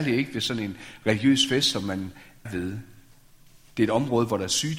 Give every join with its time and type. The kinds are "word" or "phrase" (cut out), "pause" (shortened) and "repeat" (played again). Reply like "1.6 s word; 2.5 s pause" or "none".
2.5 s word